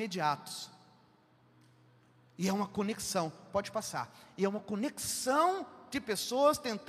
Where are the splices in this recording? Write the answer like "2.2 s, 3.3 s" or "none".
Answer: none